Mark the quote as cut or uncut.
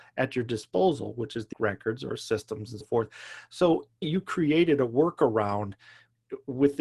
cut